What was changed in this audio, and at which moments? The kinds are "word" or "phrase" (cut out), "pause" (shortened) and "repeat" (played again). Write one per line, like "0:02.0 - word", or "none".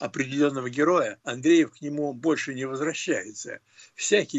0:01.2 - pause